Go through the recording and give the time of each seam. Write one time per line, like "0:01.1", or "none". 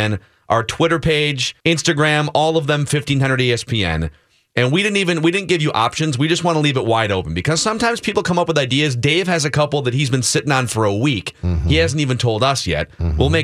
0:01.6